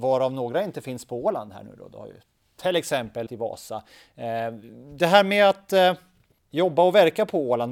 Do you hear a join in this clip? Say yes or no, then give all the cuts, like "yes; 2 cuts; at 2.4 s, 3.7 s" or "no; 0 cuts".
yes; 1 cut; at 3.3 s